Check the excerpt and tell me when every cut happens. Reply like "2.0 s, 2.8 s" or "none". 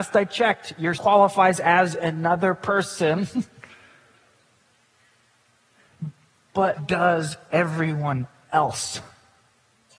1.0 s, 6.8 s